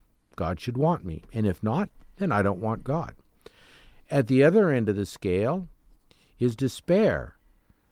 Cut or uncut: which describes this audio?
uncut